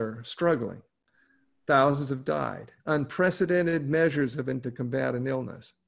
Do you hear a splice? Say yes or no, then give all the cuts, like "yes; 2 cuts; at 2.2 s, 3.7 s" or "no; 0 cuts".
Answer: yes; 2 cuts; at 2.8 s, 4.6 s